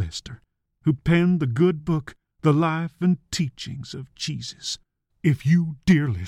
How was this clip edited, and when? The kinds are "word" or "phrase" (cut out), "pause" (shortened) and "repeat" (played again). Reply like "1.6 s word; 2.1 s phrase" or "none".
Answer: none